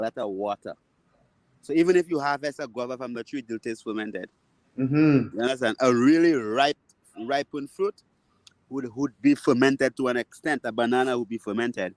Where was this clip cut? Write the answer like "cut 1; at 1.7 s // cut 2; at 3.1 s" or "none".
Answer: none